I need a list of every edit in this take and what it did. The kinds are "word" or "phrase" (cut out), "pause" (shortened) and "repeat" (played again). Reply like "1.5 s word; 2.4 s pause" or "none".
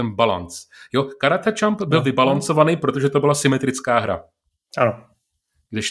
none